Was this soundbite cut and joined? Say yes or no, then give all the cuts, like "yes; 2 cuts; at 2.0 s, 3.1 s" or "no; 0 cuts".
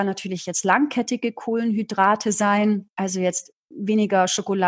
no; 0 cuts